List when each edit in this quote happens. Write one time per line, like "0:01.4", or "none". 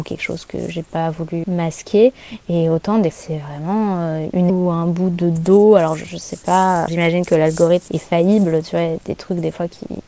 0:01.4
0:03.1
0:04.5
0:06.9
0:07.9